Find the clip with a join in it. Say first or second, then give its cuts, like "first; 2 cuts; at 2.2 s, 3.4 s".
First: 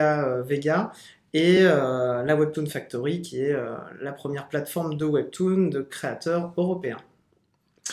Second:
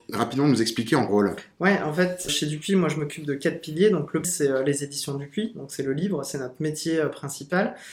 second; 3 cuts; at 1.1 s, 2.3 s, 4.2 s